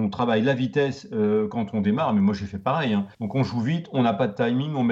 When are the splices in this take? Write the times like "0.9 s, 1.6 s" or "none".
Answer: 3.1 s